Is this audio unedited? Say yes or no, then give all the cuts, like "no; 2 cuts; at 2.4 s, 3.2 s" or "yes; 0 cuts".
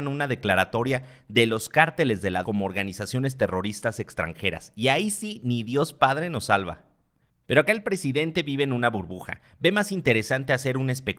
no; 1 cut; at 2.4 s